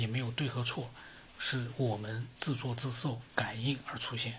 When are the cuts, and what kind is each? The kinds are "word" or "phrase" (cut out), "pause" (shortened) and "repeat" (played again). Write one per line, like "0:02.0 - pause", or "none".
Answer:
0:01.3 - pause
0:03.3 - pause